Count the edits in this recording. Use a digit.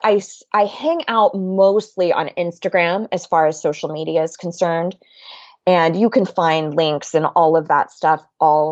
0